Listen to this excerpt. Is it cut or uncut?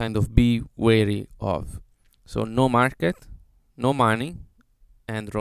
uncut